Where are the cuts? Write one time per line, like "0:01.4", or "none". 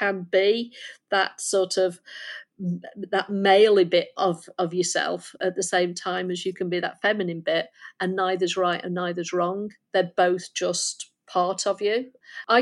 none